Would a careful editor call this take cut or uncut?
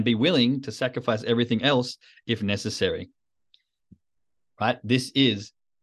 uncut